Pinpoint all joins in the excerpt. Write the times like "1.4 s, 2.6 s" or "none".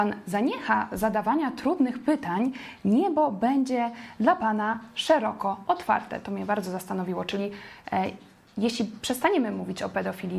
none